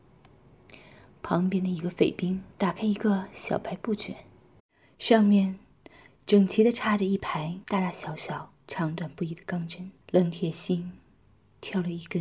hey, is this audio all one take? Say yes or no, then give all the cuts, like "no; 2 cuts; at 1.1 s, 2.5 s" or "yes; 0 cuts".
no; 5 cuts; at 2.5 s, 4.6 s, 7.6 s, 8.6 s, 10.0 s